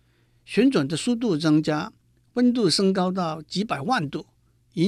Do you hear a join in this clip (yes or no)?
no